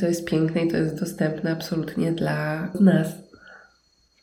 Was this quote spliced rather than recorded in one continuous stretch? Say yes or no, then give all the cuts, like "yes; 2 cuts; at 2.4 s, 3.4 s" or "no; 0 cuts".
yes; 1 cut; at 2.7 s